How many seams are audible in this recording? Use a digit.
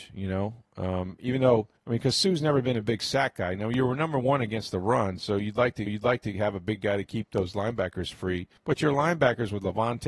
3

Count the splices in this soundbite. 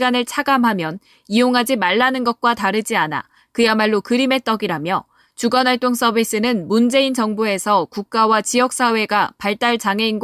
0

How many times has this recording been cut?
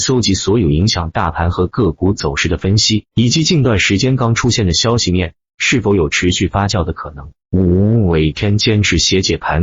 1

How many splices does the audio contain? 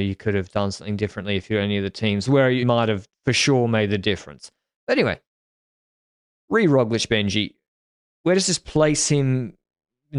1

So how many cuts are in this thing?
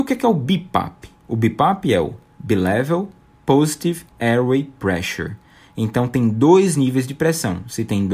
2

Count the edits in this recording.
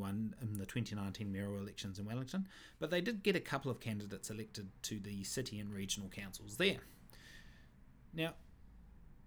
0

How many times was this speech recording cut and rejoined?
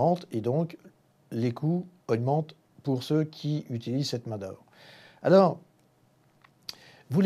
1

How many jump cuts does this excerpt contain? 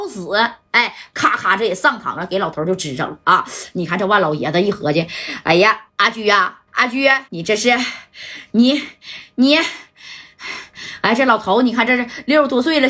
3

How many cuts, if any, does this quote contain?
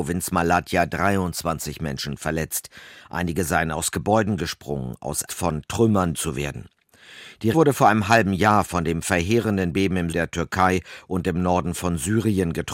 4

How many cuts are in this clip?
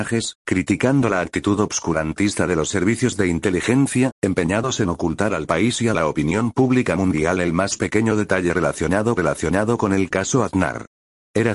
1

